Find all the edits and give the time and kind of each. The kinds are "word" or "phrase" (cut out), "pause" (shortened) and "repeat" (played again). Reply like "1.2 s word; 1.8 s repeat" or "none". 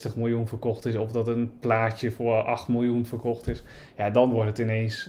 none